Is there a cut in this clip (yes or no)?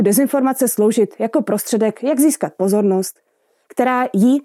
no